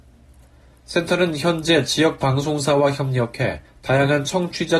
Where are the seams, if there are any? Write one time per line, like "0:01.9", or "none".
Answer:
0:03.7

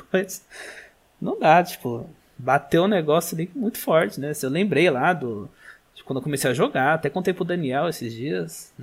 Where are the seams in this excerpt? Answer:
none

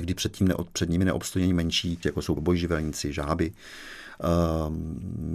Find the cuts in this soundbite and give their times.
0:02.0
0:02.4

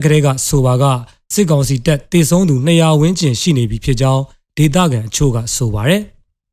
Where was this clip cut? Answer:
none

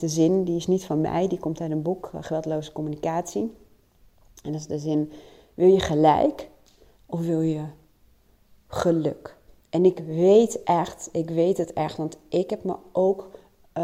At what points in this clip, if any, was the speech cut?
none

